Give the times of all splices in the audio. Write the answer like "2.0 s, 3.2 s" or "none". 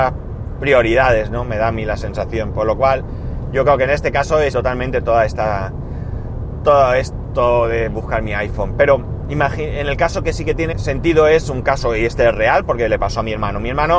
4.5 s, 10.7 s